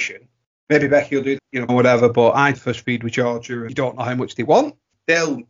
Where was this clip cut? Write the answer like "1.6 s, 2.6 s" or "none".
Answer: 1.4 s, 1.7 s, 2.5 s, 3.7 s